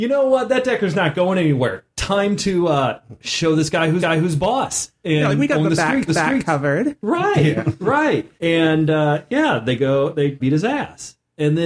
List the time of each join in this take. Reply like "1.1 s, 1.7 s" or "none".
4.0 s, 6.1 s, 8.4 s, 10.4 s